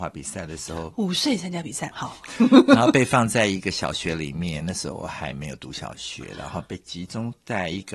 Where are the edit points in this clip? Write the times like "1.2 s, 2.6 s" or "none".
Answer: 1.9 s